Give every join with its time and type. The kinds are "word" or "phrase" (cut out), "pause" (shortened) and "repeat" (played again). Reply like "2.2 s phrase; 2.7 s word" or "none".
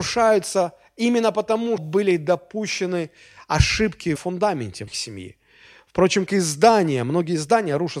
1.8 s word; 4.2 s word; 4.9 s word; 6.3 s word